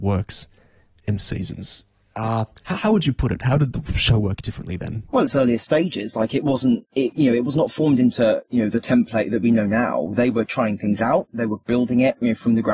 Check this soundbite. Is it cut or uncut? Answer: cut